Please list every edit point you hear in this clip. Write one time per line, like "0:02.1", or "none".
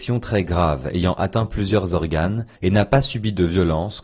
0:02.5